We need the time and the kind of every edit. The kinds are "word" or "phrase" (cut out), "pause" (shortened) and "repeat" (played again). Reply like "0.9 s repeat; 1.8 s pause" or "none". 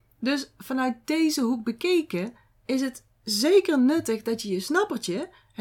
none